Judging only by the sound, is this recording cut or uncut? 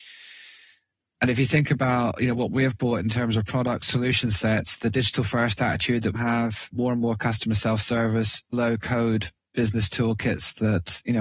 cut